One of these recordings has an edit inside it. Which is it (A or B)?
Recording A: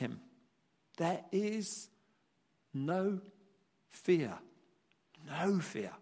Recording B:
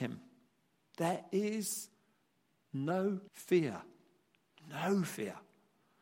B